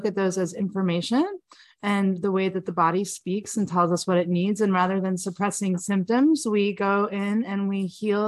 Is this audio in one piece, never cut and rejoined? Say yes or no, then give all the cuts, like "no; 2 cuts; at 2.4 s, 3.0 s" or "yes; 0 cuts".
yes; 0 cuts